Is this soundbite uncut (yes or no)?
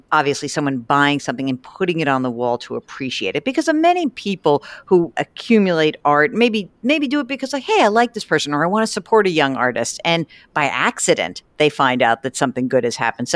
yes